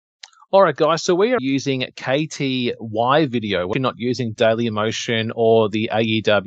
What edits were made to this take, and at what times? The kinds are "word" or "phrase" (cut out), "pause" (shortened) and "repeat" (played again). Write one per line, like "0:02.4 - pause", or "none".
0:01.4 - word
0:03.7 - word